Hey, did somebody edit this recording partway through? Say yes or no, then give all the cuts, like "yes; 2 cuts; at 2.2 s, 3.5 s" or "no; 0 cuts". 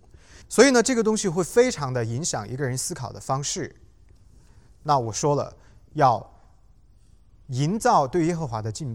no; 0 cuts